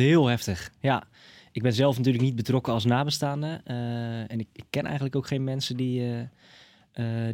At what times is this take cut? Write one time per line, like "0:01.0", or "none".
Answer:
none